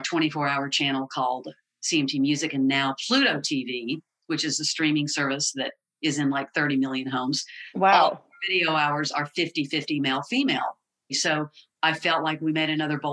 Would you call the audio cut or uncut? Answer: uncut